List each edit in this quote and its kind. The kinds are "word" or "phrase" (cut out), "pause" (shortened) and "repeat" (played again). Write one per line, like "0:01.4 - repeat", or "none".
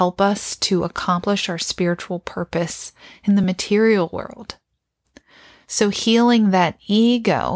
none